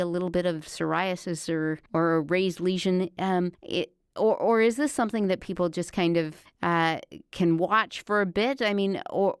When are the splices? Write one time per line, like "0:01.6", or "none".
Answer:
0:01.9
0:03.5
0:06.5